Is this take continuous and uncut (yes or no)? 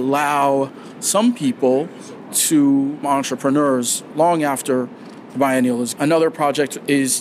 no